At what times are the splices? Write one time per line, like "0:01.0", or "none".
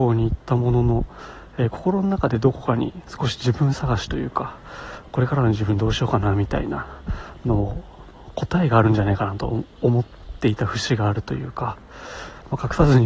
none